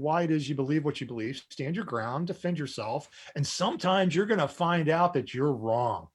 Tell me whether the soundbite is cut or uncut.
uncut